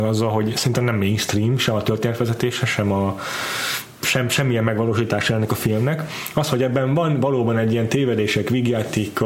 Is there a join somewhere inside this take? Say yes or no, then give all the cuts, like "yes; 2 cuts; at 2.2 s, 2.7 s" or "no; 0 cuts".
no; 0 cuts